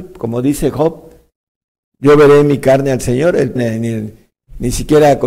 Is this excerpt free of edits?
no; 1 cut; at 3.6 s

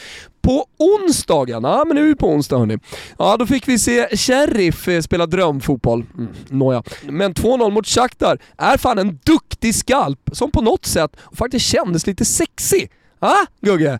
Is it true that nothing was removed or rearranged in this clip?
yes; 0 cuts

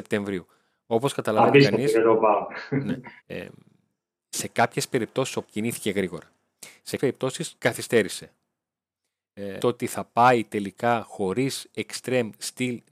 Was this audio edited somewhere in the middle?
yes; 5 cuts; at 3.2 s, 5.4 s, 7.0 s, 7.6 s, 9.6 s

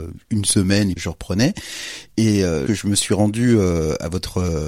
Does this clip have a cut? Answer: yes; 2 cuts; at 1.0 s, 2.7 s

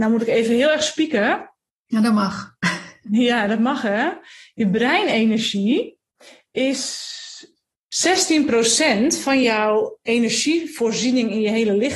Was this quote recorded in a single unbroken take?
yes; 0 cuts

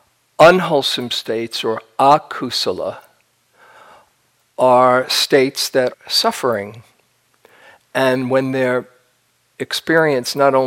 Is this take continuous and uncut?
no; 1 cut; at 5.9 s

